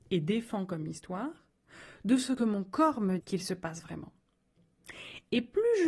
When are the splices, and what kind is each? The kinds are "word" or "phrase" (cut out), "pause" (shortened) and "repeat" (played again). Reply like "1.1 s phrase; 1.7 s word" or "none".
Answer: 3.2 s word

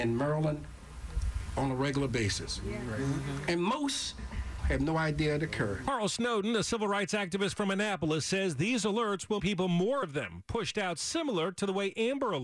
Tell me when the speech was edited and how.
4.6 s word; 9.4 s word; 10.0 s word

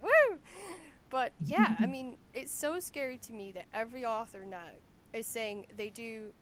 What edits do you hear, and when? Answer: 1.0 s pause; 2.2 s pause; 4.9 s pause

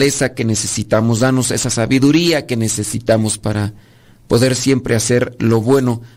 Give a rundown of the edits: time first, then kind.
none

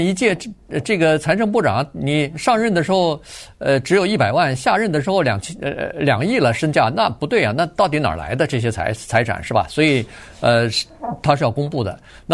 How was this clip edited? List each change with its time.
none

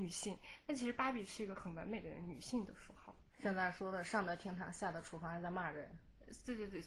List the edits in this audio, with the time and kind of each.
3.3 s pause

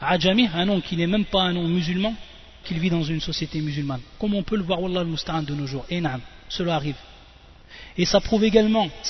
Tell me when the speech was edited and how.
2.6 s word

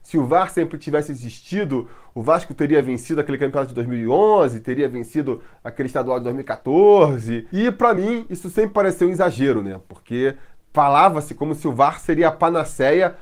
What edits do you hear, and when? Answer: none

